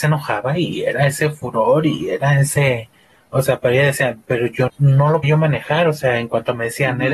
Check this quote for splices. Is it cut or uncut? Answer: cut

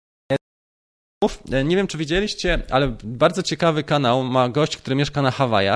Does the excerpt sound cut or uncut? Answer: uncut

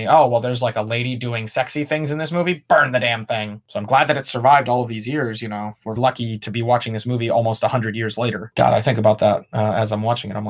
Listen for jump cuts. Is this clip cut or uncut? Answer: cut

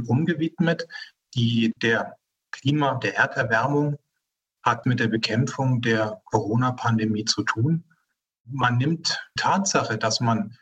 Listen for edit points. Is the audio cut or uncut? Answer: cut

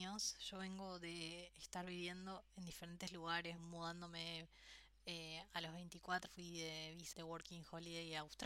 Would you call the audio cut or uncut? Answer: cut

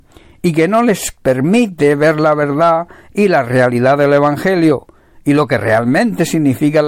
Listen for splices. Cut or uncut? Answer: uncut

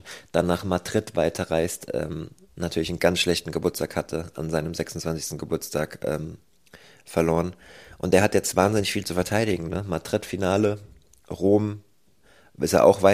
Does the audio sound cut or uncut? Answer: uncut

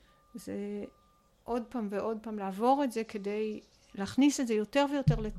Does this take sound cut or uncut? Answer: uncut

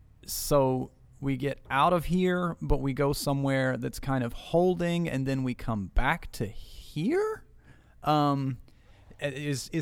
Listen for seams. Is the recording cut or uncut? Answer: uncut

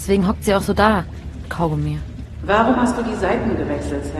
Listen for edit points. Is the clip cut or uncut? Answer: cut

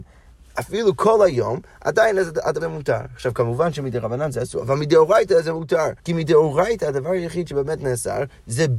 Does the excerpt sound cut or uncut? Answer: cut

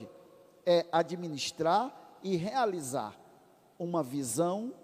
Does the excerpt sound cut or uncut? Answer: uncut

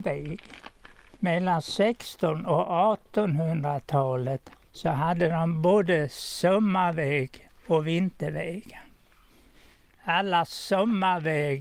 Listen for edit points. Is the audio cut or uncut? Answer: uncut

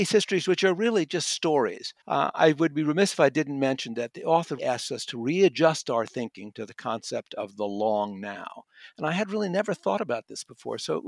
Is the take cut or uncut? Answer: cut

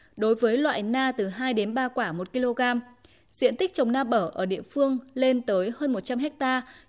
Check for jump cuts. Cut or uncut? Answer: uncut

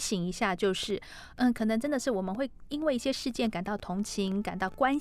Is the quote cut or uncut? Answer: uncut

